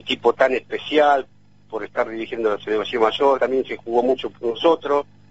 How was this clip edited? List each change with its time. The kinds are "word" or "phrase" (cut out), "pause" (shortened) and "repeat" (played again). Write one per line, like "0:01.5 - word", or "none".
0:03.4 - word

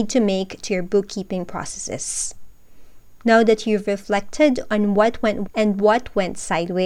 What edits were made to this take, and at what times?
0:05.5 - word

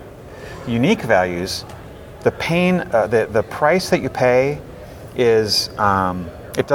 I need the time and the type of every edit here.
none

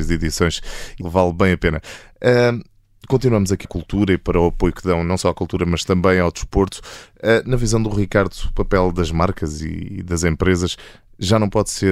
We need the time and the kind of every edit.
0:01.0 - word
0:03.6 - phrase

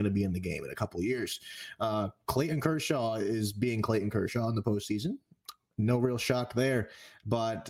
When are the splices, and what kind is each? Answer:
none

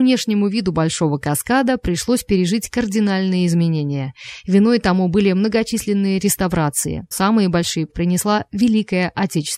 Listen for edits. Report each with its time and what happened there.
0:07.1 - word
0:07.9 - word

